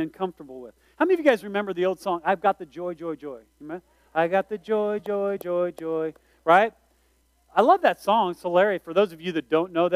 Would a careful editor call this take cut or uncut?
uncut